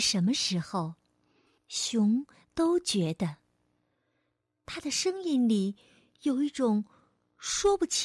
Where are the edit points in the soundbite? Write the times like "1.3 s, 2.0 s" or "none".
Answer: none